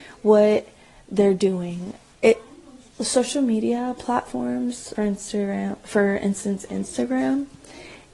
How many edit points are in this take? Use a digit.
1